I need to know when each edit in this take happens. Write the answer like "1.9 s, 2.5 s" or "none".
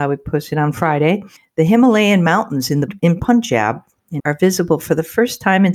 1.4 s, 2.9 s, 4.2 s